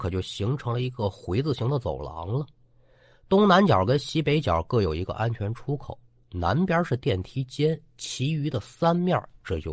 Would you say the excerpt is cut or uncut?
uncut